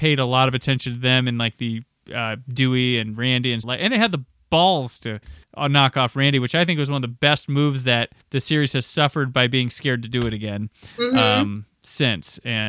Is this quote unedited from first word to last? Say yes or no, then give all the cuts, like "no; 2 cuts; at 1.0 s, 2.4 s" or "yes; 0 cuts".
no; 3 cuts; at 3.6 s, 5.4 s, 8.2 s